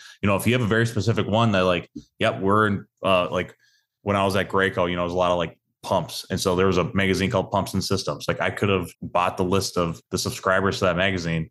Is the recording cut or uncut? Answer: cut